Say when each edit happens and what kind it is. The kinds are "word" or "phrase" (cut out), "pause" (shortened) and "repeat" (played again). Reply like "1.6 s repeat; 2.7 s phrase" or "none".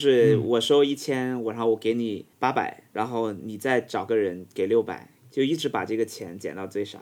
2.3 s pause; 5.2 s pause